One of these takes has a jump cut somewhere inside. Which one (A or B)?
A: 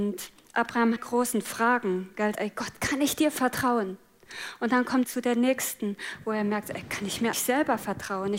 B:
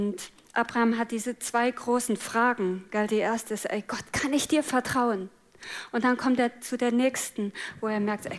A